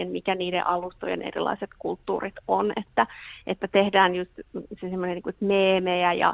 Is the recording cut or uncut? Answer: uncut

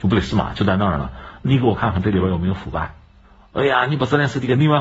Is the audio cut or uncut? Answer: uncut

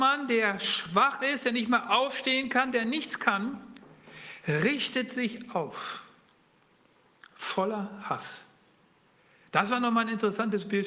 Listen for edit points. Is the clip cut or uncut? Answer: uncut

